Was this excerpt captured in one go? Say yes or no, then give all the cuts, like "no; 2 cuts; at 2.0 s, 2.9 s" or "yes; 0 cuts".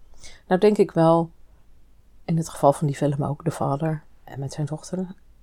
yes; 0 cuts